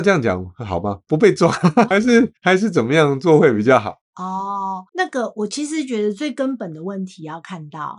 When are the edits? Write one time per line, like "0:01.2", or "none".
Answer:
0:02.4
0:04.9